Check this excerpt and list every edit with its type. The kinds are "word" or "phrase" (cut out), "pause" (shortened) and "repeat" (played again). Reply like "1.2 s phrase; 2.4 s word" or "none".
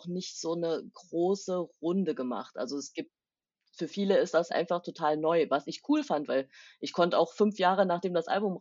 4.5 s word